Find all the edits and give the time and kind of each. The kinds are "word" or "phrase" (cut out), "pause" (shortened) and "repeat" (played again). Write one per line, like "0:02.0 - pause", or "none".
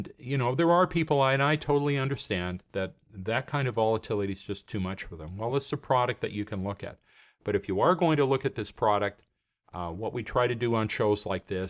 none